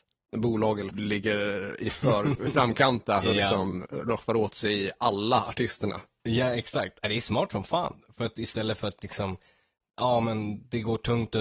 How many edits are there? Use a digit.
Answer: 1